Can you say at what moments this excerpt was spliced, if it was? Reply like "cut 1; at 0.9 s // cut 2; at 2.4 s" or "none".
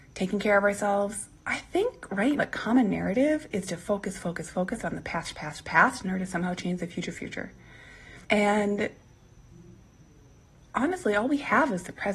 cut 1; at 2.4 s // cut 2; at 7.1 s // cut 3; at 8.2 s